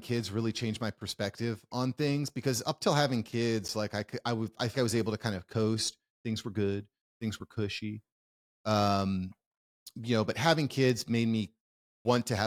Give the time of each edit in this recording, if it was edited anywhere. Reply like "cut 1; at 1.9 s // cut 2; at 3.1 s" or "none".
cut 1; at 4.7 s